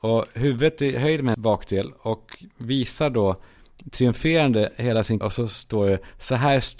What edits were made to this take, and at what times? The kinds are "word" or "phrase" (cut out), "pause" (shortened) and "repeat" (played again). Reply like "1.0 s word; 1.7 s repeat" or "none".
1.3 s word; 5.2 s word